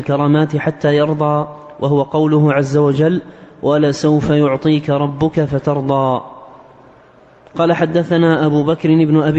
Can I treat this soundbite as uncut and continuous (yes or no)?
yes